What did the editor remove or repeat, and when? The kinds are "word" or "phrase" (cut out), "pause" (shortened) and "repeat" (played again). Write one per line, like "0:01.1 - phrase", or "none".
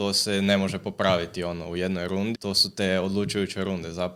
0:02.3 - word